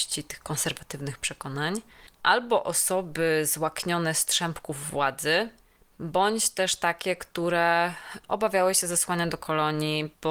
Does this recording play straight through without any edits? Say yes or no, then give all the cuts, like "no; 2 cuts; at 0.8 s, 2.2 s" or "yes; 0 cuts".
yes; 0 cuts